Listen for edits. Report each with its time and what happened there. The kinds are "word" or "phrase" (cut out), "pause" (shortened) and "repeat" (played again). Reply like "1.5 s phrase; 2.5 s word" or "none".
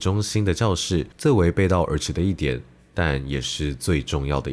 1.1 s pause